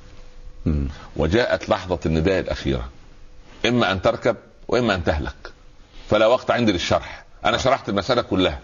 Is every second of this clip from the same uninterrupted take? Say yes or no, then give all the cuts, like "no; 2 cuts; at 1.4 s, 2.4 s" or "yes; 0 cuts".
yes; 0 cuts